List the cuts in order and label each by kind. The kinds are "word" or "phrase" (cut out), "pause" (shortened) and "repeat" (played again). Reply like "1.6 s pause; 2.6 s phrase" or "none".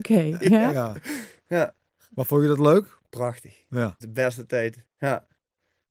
3.0 s pause; 4.0 s word; 4.9 s pause